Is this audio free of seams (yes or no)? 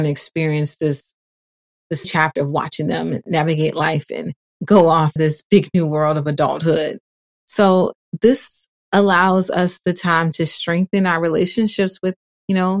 no